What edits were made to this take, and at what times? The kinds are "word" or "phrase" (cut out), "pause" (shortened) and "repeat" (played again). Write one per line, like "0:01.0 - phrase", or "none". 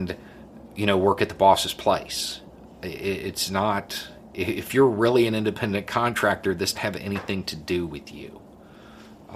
0:06.7 - word